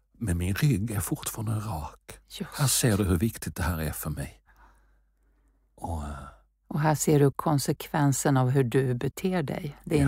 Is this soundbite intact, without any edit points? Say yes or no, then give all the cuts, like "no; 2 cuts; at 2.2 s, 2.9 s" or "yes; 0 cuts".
yes; 0 cuts